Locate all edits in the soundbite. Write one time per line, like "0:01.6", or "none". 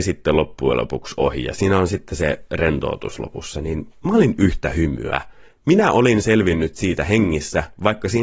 none